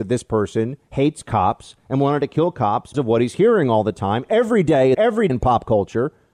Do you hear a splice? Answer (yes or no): yes